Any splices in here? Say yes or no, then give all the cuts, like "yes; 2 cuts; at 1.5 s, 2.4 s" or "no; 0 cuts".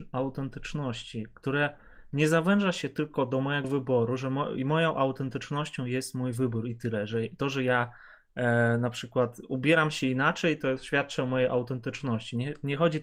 no; 0 cuts